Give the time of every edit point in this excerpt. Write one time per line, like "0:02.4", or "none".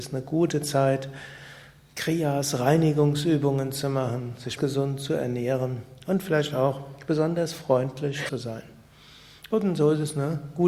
0:04.6
0:08.3